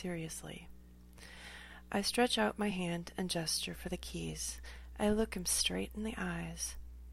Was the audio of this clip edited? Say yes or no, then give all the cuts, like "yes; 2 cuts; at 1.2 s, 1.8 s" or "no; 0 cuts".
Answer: no; 0 cuts